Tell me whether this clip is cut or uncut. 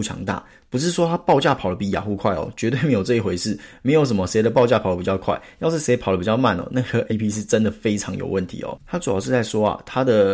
cut